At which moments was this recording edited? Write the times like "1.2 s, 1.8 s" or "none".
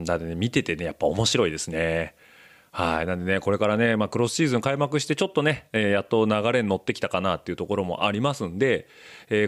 none